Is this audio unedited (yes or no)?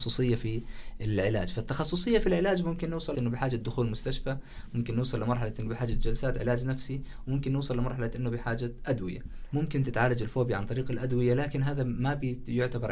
no